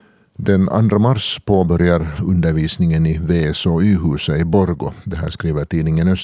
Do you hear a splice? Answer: yes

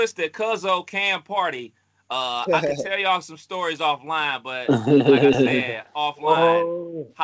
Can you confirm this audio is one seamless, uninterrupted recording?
yes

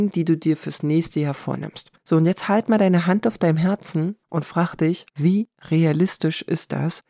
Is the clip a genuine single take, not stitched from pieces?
no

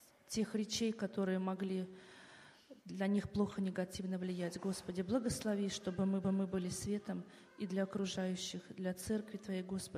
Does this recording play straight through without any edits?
no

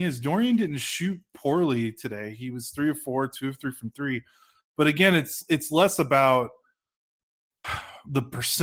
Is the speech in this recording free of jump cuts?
yes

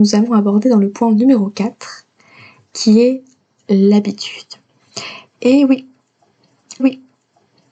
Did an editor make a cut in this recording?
yes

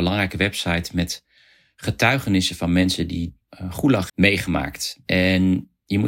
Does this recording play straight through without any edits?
no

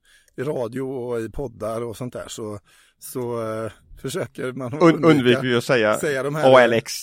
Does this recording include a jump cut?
no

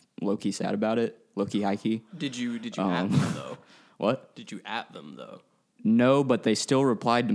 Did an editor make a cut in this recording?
no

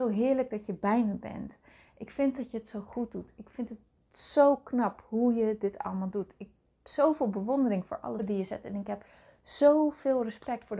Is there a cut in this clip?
yes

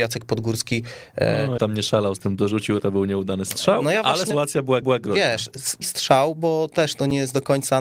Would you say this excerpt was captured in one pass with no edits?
no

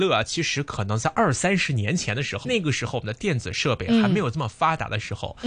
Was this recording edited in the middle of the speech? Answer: yes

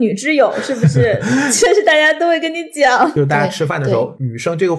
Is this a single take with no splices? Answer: yes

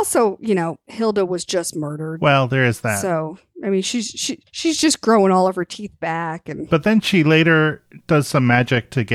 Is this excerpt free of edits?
no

